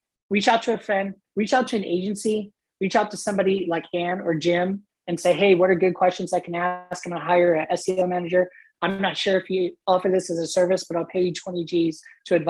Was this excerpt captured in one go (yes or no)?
yes